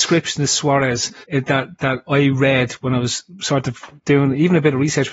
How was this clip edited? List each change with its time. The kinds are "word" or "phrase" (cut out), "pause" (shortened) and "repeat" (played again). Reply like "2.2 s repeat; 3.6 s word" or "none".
1.2 s pause; 4.0 s pause